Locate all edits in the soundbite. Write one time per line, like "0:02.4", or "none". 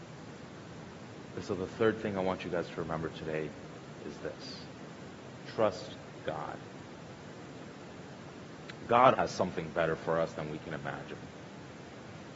0:06.2
0:09.1